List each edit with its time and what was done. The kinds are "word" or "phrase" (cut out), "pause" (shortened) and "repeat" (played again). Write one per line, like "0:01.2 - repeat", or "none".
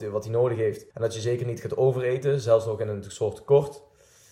0:00.9 - pause